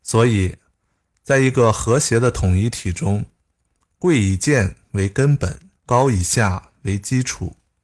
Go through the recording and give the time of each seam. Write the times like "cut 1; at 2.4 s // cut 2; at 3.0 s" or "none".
cut 1; at 5.8 s